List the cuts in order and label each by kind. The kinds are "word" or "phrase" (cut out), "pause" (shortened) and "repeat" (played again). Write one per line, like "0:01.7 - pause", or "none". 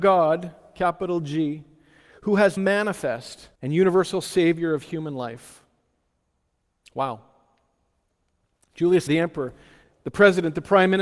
0:02.6 - word
0:03.5 - pause
0:09.1 - word